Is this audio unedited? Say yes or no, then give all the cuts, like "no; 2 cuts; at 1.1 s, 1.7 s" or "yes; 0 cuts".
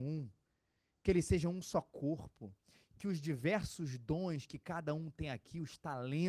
yes; 0 cuts